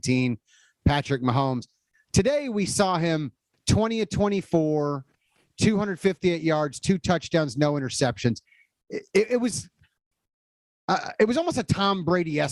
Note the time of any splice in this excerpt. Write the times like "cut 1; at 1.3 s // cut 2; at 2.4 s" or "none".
none